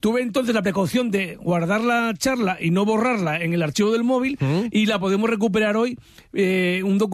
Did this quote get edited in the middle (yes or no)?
no